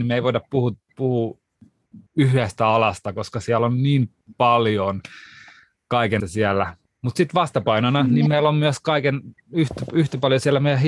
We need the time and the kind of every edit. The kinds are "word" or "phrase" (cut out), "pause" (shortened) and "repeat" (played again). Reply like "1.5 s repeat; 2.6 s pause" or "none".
2.1 s pause; 6.2 s word